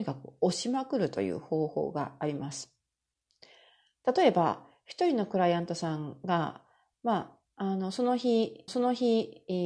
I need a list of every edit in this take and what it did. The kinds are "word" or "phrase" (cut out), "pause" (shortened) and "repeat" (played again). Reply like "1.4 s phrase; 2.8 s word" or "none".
8.7 s repeat